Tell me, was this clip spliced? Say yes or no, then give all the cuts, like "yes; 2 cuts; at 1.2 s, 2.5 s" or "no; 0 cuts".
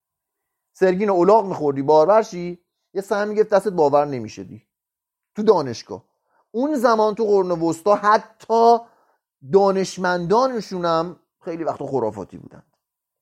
no; 0 cuts